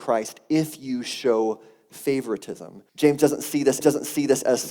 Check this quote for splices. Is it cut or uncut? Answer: cut